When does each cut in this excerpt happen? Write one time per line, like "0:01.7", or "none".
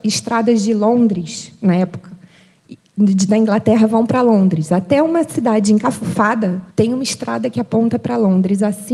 0:06.7